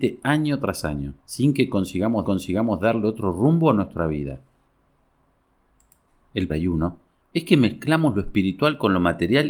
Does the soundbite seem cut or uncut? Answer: cut